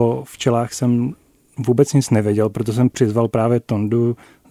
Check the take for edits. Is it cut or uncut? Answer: uncut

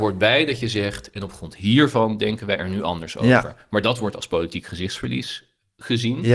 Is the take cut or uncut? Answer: uncut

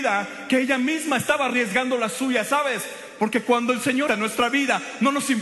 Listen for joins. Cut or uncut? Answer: cut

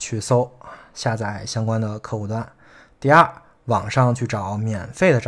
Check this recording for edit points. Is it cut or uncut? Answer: uncut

